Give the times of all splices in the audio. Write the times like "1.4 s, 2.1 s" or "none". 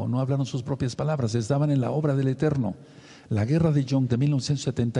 4.1 s